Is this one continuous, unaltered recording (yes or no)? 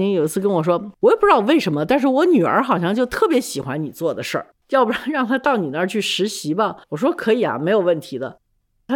no